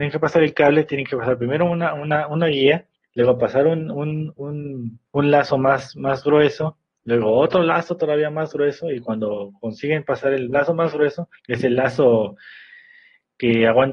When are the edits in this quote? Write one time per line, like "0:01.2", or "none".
0:02.9
0:05.1
0:11.4